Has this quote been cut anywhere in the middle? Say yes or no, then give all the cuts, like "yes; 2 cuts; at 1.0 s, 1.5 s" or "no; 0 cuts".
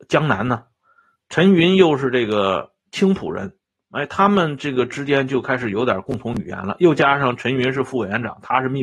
no; 0 cuts